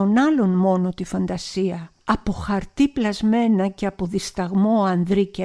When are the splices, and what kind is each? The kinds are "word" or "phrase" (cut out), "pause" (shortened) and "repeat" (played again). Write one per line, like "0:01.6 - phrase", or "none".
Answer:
0:02.0 - pause